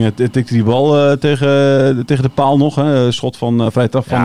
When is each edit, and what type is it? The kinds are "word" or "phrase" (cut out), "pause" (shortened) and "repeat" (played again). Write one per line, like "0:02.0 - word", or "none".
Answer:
none